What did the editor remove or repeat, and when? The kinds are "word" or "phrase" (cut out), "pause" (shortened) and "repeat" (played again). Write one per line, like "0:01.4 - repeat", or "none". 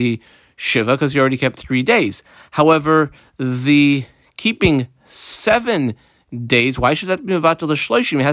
none